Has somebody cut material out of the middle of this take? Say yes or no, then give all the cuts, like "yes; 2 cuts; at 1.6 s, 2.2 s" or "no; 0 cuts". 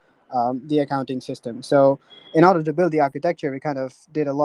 no; 0 cuts